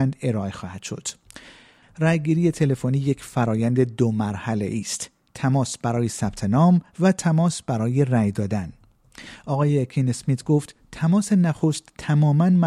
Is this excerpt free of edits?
yes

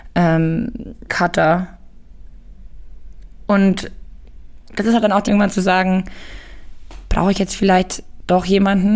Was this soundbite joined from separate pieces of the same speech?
yes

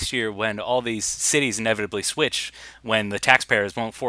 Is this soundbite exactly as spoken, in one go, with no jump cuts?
yes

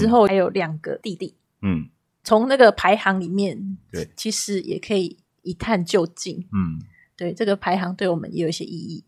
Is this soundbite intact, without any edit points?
yes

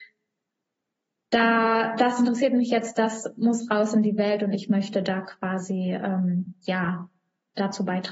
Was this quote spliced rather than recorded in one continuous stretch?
no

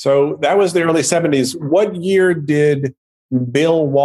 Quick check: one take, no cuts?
yes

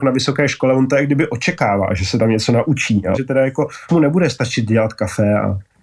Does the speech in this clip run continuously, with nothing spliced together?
no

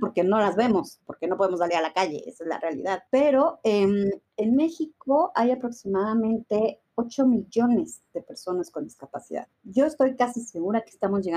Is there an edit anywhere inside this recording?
yes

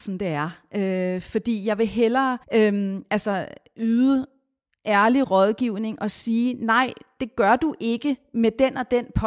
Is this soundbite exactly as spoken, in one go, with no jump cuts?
no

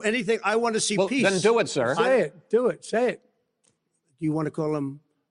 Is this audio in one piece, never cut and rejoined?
yes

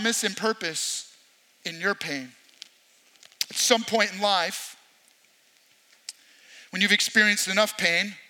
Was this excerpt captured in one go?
yes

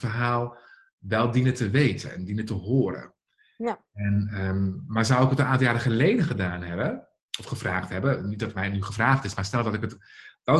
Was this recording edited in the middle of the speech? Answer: no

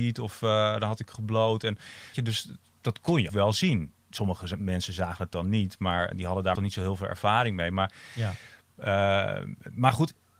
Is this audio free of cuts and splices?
no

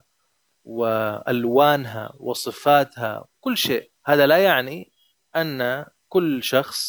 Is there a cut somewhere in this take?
yes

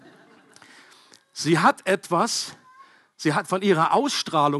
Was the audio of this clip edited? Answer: no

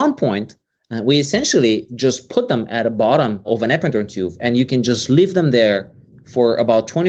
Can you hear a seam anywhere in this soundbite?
no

